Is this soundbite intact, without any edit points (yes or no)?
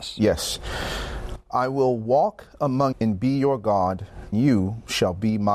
no